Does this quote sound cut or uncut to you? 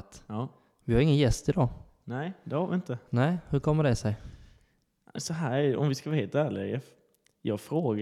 uncut